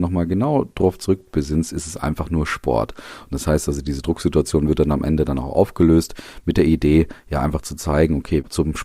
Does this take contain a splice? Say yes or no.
no